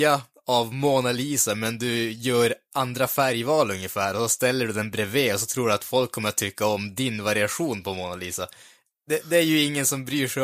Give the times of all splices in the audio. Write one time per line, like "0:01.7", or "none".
none